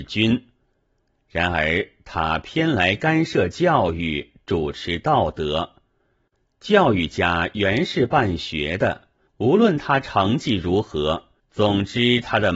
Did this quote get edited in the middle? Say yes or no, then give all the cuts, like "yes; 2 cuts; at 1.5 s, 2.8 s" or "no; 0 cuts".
yes; 2 cuts; at 9.3 s, 11.4 s